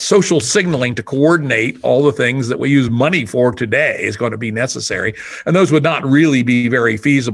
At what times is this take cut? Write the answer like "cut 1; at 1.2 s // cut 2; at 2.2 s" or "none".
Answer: none